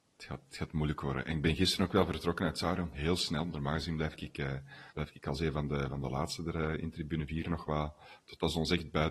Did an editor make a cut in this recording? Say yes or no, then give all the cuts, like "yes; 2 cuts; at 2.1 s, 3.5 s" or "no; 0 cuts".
yes; 1 cut; at 4.9 s